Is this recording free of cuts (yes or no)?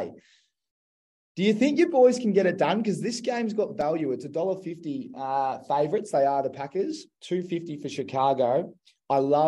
yes